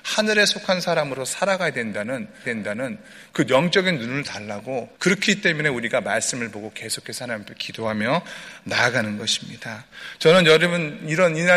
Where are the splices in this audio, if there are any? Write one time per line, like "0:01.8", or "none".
0:02.4
0:04.9